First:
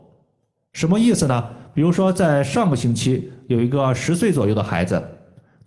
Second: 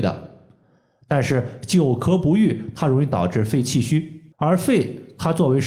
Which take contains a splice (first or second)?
second